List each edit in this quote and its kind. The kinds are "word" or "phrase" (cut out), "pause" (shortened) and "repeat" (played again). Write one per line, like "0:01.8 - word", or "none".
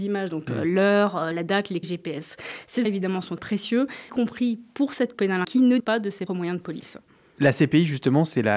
0:01.3 - word
0:01.8 - word
0:02.8 - word
0:03.4 - word
0:04.1 - word
0:05.1 - word
0:05.4 - word
0:05.8 - word
0:06.3 - word